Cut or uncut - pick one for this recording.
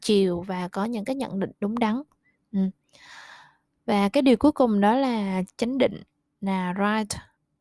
uncut